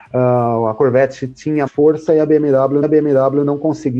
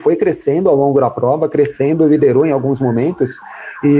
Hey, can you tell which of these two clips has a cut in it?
first; 2 cuts; at 1.7 s, 2.8 s

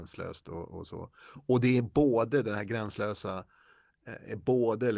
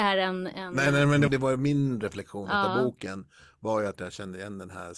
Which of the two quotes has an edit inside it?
second; 1 cut; at 1.3 s

